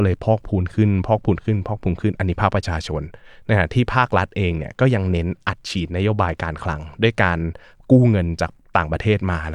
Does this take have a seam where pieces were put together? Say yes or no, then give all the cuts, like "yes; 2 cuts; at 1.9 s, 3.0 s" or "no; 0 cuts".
no; 0 cuts